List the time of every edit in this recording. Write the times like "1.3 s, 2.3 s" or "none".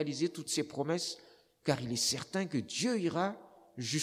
none